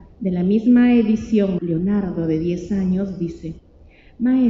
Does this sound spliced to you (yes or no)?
yes